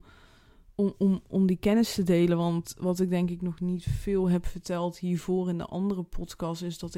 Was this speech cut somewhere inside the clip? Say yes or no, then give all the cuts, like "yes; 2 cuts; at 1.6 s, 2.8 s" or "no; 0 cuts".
no; 0 cuts